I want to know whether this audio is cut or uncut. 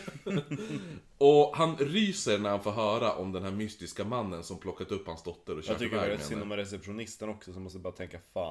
uncut